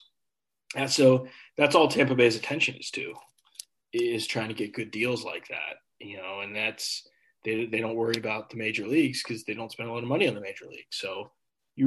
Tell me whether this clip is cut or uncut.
uncut